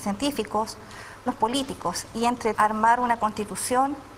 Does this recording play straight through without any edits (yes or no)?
no